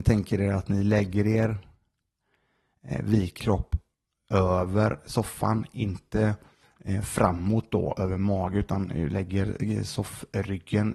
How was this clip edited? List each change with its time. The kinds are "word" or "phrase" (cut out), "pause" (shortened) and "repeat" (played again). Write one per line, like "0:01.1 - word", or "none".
0:03.4 - word

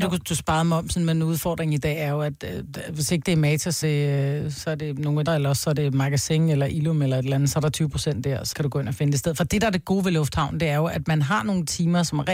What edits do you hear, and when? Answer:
0:03.8 - word
0:05.3 - word
0:08.5 - word

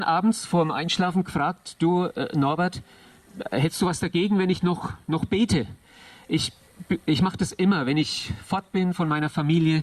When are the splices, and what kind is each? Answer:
none

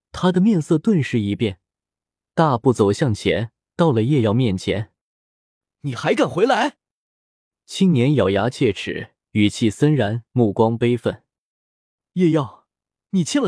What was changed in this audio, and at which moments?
0:09.2 - pause
0:10.3 - pause

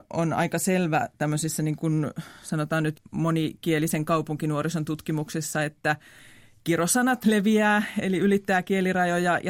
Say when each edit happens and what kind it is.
none

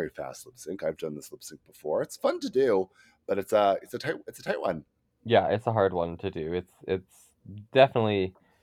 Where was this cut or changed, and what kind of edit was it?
none

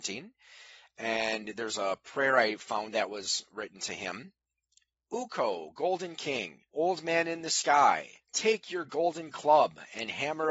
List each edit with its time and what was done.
0:06.7 - pause
0:08.2 - pause

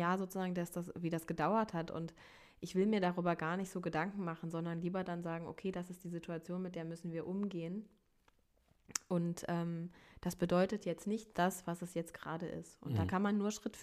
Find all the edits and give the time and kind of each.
0:11.3 - phrase

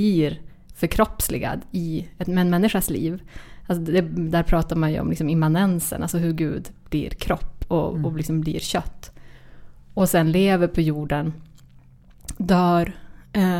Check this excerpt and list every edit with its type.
none

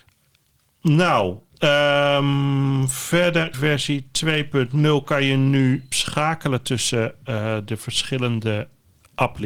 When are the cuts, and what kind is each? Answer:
0:03.5 - word
0:05.9 - word

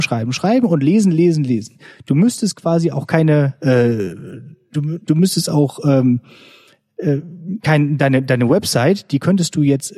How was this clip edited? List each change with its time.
none

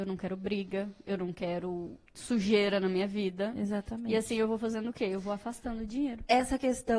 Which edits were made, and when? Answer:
0:02.1 - pause

